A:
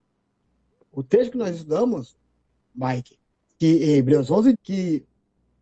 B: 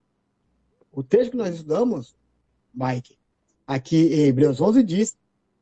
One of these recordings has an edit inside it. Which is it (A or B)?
A